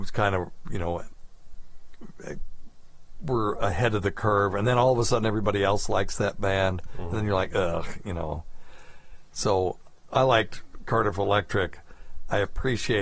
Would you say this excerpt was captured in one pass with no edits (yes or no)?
yes